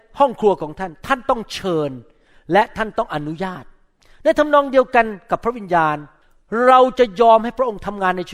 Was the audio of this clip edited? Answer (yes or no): no